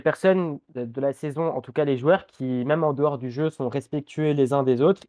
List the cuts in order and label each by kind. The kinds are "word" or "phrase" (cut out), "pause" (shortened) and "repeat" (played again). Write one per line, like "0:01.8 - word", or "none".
none